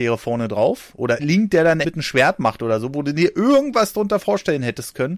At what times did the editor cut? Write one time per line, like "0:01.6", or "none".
0:01.2
0:01.8